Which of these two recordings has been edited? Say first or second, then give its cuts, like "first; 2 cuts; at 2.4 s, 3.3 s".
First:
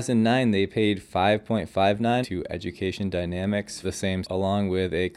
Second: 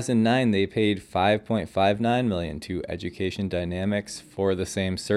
first; 3 cuts; at 2.2 s, 3.8 s, 4.2 s